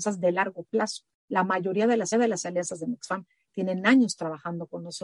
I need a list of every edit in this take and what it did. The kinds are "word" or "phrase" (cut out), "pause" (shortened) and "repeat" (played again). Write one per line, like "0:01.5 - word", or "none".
0:02.1 - repeat